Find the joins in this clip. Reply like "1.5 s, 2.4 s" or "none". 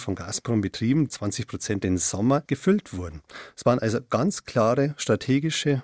1.1 s, 1.8 s, 2.5 s